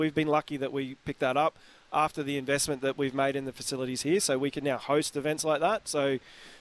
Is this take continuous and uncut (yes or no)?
yes